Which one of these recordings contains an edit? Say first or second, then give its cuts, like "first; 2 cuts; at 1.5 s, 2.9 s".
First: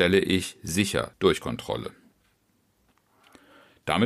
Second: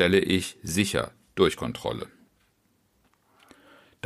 first; 1 cut; at 1.1 s